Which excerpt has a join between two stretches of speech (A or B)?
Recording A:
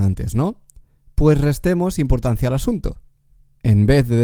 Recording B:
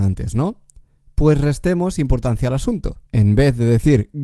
B